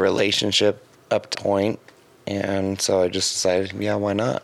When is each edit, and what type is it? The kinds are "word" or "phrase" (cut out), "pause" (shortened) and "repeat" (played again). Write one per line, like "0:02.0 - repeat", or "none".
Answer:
0:00.9 - pause
0:01.3 - word